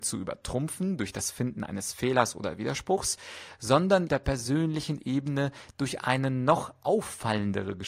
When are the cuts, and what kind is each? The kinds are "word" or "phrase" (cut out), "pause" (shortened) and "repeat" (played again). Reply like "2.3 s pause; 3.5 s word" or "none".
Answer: 4.1 s phrase